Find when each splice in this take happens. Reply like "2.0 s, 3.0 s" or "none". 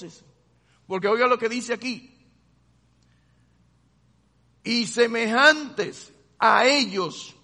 none